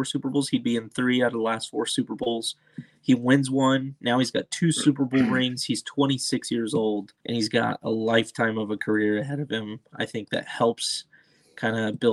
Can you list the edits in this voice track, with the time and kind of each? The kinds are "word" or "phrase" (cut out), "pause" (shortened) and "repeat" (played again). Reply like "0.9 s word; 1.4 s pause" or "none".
7.2 s pause